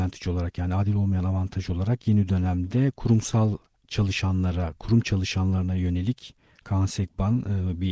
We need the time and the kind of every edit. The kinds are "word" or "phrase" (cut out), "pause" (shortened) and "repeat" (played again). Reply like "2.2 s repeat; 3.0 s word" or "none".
none